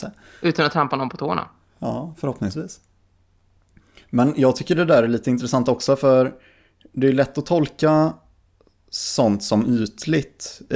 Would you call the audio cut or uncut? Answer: uncut